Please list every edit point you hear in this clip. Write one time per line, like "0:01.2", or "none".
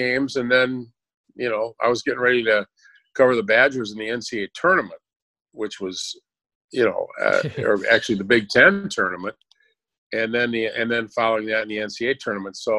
none